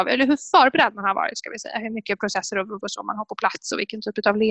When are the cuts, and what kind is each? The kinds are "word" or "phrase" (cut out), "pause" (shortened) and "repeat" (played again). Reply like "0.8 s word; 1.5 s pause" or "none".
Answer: 2.8 s word